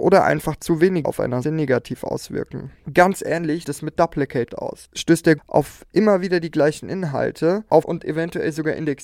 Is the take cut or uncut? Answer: cut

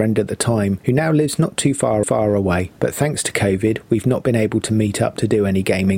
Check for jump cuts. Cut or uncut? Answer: cut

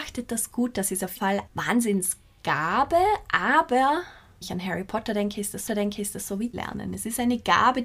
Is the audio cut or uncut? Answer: cut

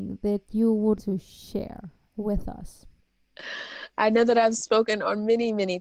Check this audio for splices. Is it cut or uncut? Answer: cut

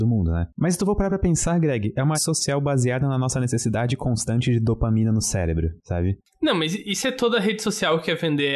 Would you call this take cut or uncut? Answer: cut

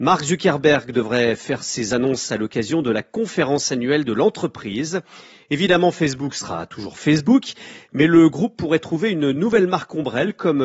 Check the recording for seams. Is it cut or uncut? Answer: uncut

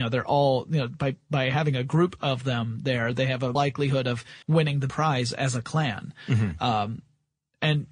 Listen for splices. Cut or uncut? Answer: cut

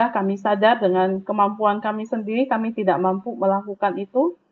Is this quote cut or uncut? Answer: uncut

